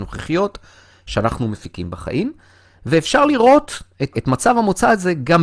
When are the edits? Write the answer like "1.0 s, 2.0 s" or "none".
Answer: 4.1 s